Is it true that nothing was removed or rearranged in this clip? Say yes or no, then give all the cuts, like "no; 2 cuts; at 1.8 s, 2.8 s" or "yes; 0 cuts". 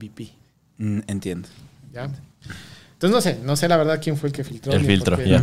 yes; 0 cuts